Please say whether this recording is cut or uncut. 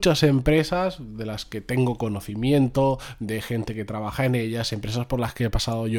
uncut